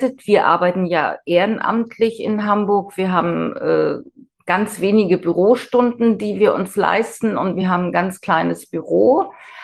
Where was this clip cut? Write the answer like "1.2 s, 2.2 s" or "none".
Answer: none